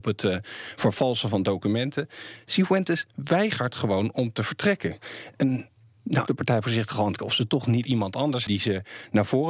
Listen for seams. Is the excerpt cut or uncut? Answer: cut